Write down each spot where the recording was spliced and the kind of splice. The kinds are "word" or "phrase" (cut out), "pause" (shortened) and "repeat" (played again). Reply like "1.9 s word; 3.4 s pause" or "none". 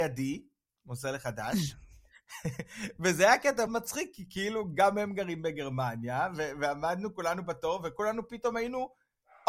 3.7 s word

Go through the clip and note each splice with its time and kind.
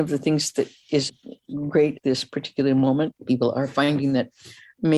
2.0 s word; 3.1 s word

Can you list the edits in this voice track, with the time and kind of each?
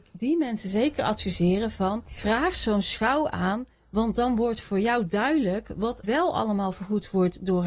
2.1 s pause; 6.0 s word

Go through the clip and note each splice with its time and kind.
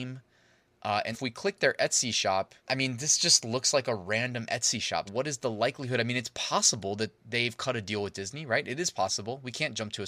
1.1 s word; 2.6 s pause; 5.1 s word

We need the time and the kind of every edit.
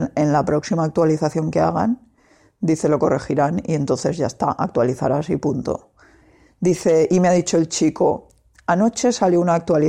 none

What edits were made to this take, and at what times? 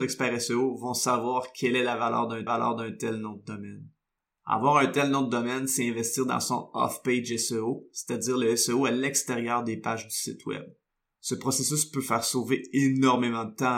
2.5 s repeat

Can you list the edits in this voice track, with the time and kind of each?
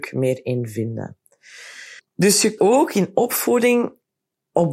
2.0 s pause; 2.6 s word

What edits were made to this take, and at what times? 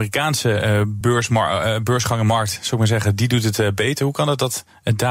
none

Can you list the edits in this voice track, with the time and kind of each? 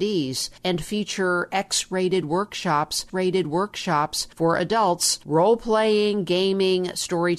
3.1 s repeat

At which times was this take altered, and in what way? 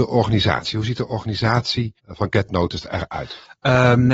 2.0 s pause

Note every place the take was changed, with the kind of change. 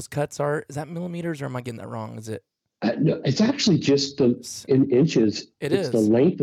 none

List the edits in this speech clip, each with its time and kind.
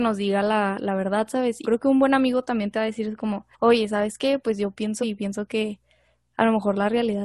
1.6 s word; 3.5 s pause; 5.0 s word

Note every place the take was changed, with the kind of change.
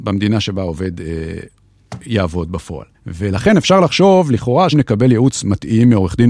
2.9 s pause; 4.7 s word

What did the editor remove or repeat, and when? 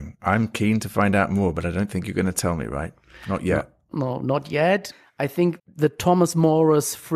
5.6 s word

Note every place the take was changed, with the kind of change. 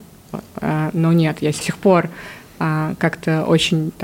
1.6 s phrase

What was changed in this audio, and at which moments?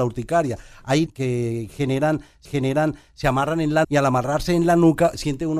1.1 s phrase; 2.5 s repeat; 3.8 s word

